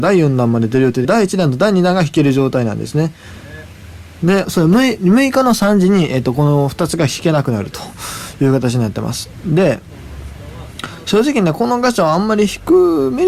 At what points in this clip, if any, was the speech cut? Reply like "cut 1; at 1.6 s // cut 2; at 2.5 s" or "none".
cut 1; at 1.0 s // cut 2; at 4.4 s